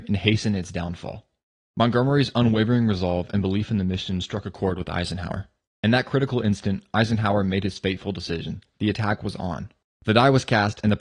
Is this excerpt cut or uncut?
uncut